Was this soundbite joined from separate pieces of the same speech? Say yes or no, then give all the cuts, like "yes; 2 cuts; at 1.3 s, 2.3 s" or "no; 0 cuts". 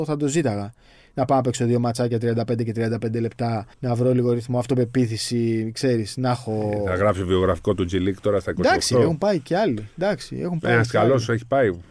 yes; 1 cut; at 3.7 s